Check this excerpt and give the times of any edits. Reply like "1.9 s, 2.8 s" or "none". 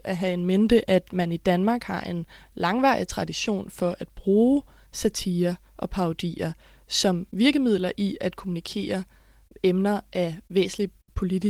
none